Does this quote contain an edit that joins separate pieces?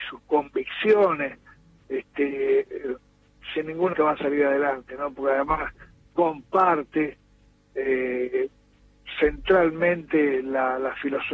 yes; 1 cut; at 3.9 s

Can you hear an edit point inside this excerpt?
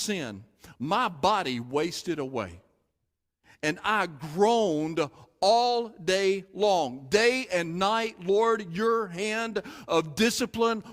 no; 0 cuts

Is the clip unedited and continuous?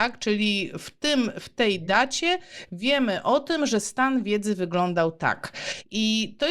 yes; 0 cuts

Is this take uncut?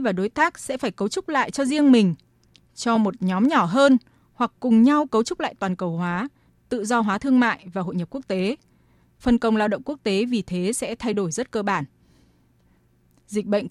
yes; 0 cuts

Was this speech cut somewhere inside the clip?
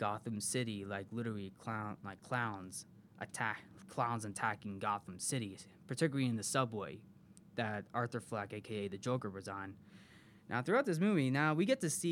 no; 0 cuts

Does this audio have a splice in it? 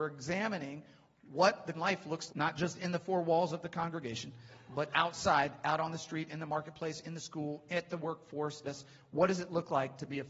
yes; 3 cuts; at 1.7 s, 2.3 s, 8.6 s

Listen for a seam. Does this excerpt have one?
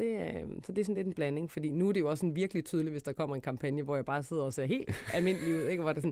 no; 0 cuts

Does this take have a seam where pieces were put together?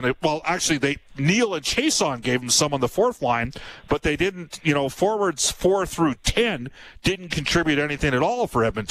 no; 0 cuts

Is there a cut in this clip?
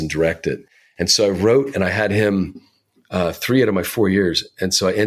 no; 0 cuts

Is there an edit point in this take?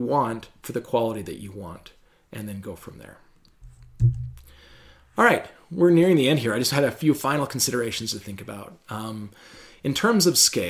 no; 0 cuts

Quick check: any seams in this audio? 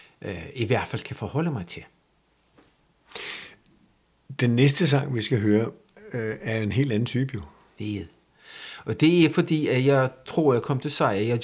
no; 0 cuts

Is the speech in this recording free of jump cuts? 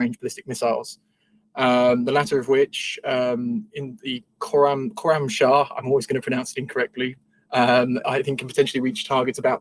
yes; 0 cuts

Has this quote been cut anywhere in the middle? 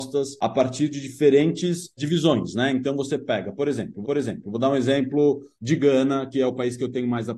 yes; 1 cut; at 4.0 s

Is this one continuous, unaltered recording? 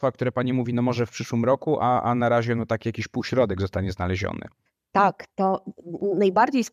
no; 1 cut; at 4.7 s

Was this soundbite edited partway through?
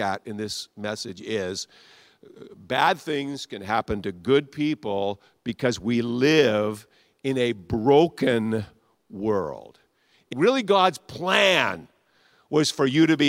yes; 1 cut; at 10.3 s

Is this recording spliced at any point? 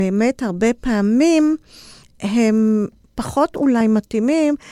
no; 0 cuts

